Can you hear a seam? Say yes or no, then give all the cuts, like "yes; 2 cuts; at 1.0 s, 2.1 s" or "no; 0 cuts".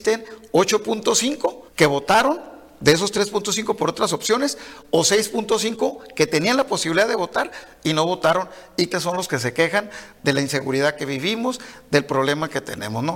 yes; 3 cuts; at 1.7 s, 8.9 s, 10.2 s